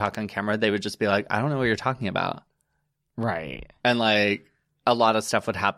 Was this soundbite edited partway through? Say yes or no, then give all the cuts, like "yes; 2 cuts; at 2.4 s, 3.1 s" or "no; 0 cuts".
no; 0 cuts